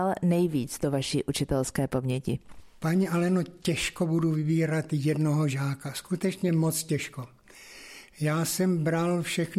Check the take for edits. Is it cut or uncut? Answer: uncut